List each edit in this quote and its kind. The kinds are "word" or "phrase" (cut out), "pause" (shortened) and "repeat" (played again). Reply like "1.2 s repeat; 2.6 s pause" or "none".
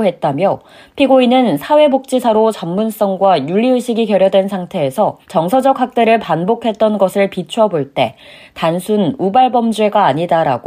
5.2 s pause

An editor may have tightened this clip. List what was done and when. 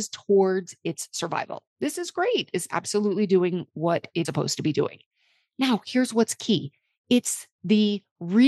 4.2 s word

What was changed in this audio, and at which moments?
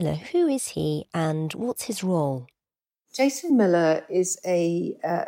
none

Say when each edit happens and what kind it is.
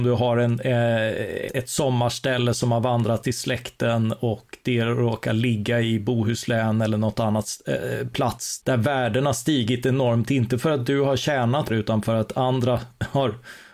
1.5 s word; 8.6 s word; 11.7 s word

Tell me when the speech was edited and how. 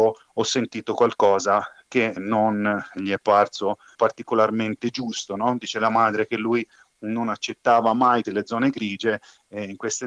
2.2 s word; 3.9 s word; 8.3 s word

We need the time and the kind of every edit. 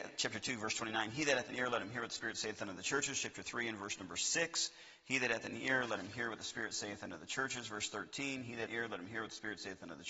8.7 s phrase

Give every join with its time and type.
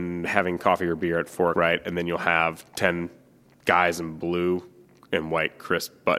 1.5 s word

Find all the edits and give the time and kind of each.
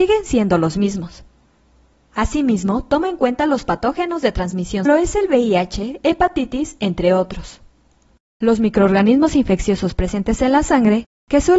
4.8 s phrase

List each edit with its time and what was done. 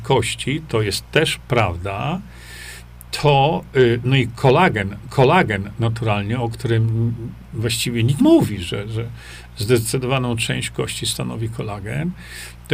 5.0 s repeat; 8.2 s word

